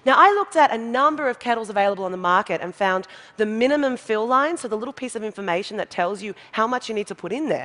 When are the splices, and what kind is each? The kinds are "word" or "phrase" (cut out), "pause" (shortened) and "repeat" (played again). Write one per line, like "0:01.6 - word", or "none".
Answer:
none